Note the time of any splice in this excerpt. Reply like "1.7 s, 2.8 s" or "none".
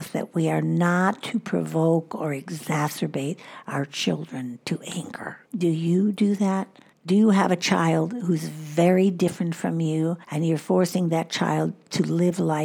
5.5 s, 6.9 s, 10.2 s